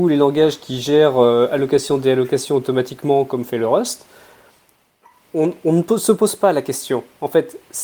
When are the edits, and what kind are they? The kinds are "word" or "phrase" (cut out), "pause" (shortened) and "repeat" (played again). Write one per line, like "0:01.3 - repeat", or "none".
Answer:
none